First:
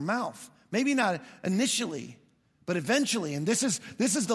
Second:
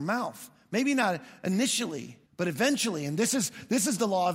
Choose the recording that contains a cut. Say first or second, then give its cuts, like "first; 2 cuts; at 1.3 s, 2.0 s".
second; 1 cut; at 2.3 s